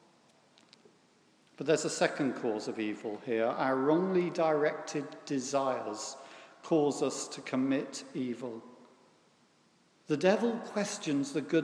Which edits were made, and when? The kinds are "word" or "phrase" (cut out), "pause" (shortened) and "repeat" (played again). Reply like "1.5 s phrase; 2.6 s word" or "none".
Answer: none

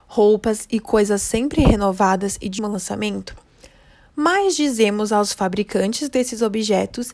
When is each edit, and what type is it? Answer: 2.6 s word

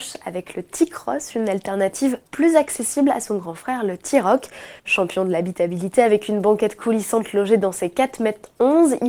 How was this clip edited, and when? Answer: 2.3 s pause; 4.8 s pause

